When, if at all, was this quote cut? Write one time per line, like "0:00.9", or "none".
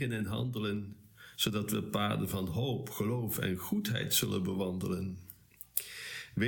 none